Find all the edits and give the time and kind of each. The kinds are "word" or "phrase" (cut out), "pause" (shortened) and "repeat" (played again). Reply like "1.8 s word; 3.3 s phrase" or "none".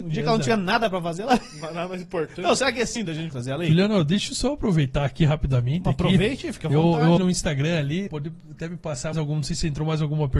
3.0 s word; 3.3 s word; 7.2 s word; 8.1 s word; 9.1 s word